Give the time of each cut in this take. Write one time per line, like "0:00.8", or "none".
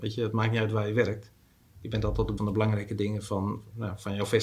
0:02.4